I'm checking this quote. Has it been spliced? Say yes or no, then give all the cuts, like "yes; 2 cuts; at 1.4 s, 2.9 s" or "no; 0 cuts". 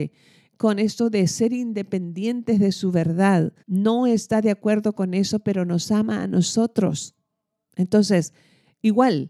yes; 1 cut; at 3.6 s